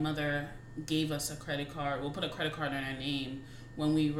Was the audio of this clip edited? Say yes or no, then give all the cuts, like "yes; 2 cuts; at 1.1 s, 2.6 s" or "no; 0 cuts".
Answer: no; 0 cuts